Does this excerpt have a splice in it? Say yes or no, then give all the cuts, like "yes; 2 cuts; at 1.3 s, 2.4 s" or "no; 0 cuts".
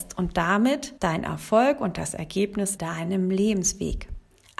yes; 2 cuts; at 1.0 s, 2.8 s